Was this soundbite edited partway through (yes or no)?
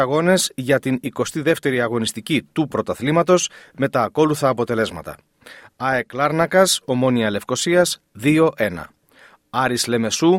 no